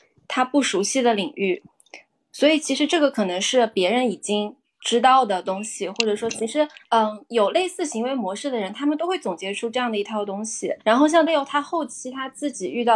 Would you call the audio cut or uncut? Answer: cut